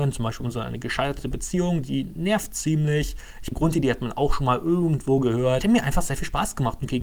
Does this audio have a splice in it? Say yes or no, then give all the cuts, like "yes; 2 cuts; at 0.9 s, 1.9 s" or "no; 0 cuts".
yes; 2 cuts; at 3.5 s, 5.6 s